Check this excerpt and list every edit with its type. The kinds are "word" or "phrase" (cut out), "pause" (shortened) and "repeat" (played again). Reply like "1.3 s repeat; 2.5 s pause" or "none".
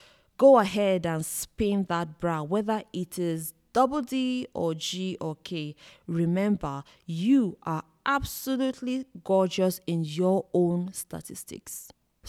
none